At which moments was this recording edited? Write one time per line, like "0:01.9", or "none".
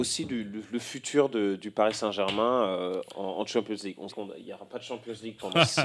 0:04.1